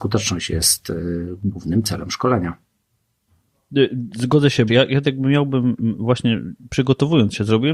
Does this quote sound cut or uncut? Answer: cut